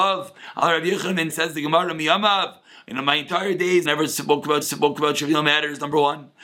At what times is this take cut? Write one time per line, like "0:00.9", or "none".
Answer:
0:01.3
0:03.9
0:04.6